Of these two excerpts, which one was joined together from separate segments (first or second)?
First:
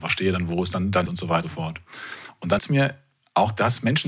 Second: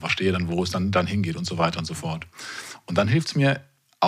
first